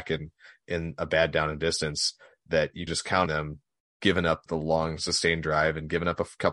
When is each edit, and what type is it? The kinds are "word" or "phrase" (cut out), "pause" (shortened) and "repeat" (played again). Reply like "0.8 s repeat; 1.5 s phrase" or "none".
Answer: 2.9 s word; 3.3 s word; 4.5 s word